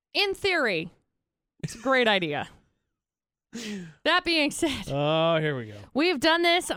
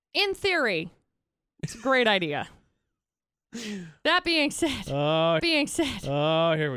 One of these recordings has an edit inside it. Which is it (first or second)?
second